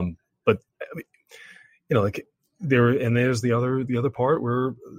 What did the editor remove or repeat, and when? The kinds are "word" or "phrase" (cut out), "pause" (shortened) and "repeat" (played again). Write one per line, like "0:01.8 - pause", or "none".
none